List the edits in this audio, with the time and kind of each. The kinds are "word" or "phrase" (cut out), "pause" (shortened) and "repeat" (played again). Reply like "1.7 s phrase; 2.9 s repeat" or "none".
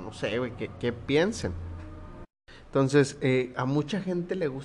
none